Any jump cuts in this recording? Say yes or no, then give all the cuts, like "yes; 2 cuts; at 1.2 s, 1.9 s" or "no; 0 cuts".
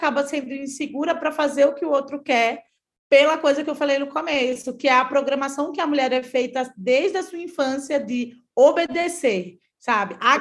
no; 0 cuts